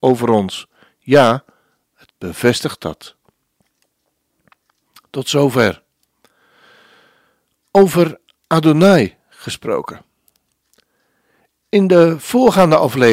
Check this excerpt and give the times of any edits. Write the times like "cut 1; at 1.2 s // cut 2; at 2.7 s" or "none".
cut 1; at 2.1 s